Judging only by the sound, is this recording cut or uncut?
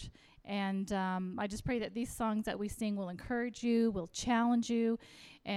uncut